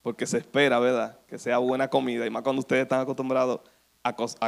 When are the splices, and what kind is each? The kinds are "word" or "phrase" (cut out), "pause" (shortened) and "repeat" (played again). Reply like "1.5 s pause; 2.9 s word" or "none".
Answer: none

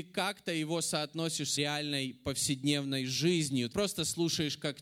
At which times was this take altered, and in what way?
1.6 s word; 3.7 s word

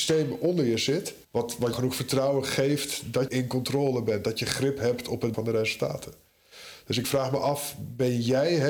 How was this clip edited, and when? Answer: 1.2 s pause; 1.7 s word; 3.3 s word; 5.3 s word; 7.0 s word

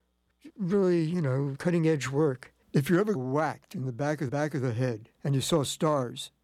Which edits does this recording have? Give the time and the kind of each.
1.5 s word; 2.6 s pause; 3.1 s word; 4.3 s repeat; 5.1 s pause

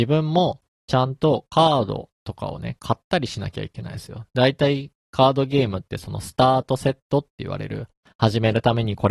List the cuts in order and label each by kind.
none

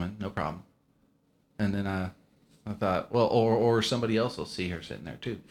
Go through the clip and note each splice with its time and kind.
none

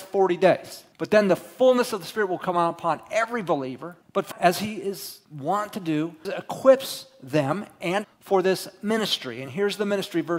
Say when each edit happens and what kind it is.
0.9 s pause; 4.0 s pause; 4.3 s word; 5.2 s pause; 6.3 s word; 8.0 s word

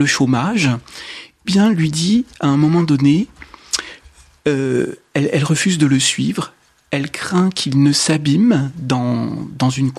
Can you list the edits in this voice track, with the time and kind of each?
1.4 s word

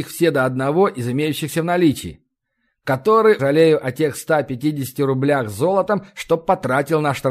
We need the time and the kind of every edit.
3.4 s phrase

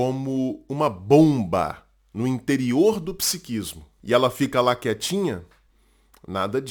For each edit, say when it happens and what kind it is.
none

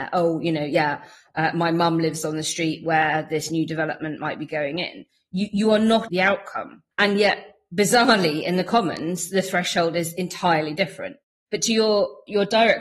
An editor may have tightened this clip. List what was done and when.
6.1 s phrase; 6.9 s pause

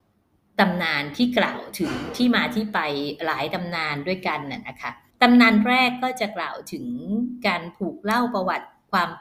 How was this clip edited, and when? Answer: 5.1 s pause

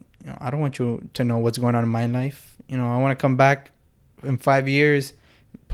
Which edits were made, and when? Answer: none

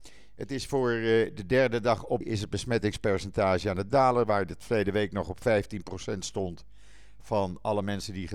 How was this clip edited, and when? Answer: 2.2 s phrase

